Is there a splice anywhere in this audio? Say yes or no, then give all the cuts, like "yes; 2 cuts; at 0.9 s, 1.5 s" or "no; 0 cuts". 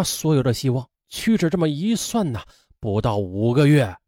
yes; 1 cut; at 1.0 s